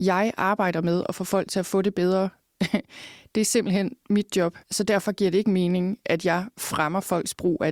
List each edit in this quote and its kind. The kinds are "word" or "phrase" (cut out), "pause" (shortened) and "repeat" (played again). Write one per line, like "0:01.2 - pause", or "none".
0:04.6 - pause